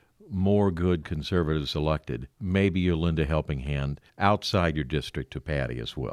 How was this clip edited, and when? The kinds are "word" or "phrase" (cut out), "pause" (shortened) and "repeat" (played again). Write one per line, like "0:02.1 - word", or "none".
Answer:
0:02.3 - pause
0:04.1 - pause